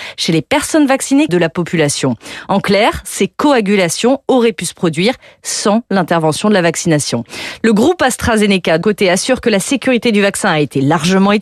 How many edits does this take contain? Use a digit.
2